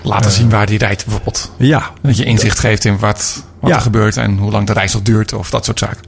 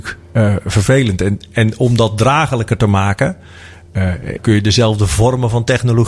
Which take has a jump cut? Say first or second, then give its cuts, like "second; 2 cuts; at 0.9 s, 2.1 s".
second; 1 cut; at 4.4 s